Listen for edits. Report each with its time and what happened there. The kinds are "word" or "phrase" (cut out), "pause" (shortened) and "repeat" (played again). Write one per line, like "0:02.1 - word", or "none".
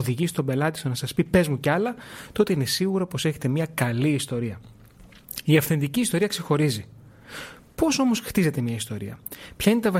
none